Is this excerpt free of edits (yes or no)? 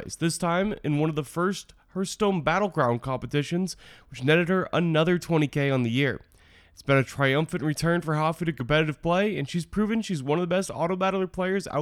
yes